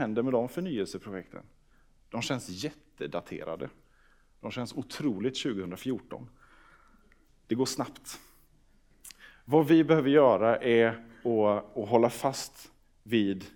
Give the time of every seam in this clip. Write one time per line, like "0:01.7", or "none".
none